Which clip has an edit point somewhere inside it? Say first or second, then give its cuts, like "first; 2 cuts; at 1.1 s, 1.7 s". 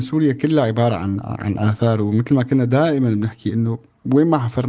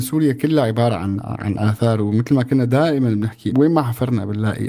second; 1 cut; at 3.5 s